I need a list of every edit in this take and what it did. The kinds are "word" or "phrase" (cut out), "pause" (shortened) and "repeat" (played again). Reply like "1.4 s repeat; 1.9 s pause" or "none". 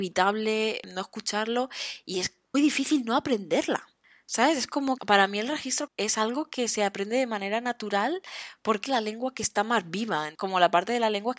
2.5 s word; 5.0 s word; 5.9 s word; 8.9 s word